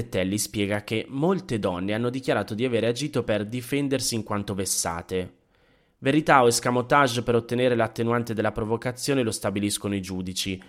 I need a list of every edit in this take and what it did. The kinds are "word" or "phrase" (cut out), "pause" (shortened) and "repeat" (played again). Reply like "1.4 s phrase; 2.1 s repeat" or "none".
none